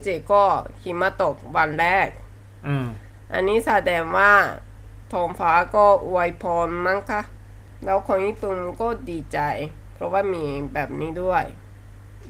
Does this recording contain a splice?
no; 0 cuts

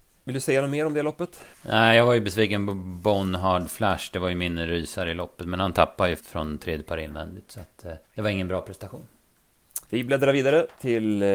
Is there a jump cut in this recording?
yes; 4 cuts; at 1.5 s, 6.2 s, 8.0 s, 9.8 s

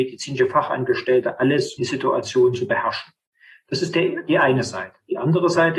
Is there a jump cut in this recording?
yes; 1 cut; at 1.8 s

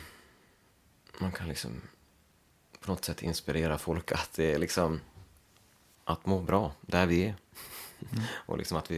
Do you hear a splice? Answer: no; 0 cuts

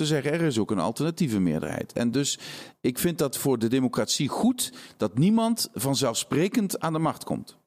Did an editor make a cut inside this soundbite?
no; 0 cuts

